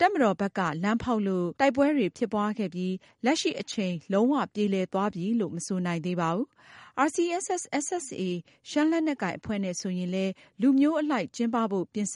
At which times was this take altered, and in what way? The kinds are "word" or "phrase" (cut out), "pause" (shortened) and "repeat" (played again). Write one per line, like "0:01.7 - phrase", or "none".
0:01.6 - pause